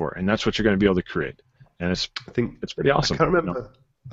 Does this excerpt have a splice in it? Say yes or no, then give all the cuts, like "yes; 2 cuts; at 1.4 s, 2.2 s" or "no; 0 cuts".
no; 0 cuts